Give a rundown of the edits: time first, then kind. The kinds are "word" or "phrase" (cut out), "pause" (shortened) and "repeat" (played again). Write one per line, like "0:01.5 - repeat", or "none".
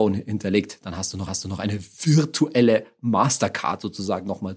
0:01.3 - repeat